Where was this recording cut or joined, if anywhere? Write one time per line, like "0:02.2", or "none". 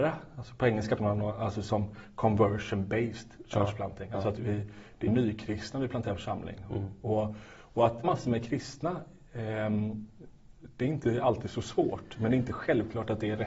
0:01.0
0:04.4
0:05.1
0:08.0